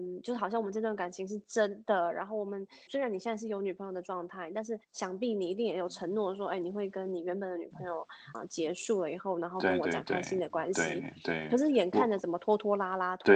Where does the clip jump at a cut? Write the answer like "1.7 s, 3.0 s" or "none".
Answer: 2.9 s, 4.8 s, 8.3 s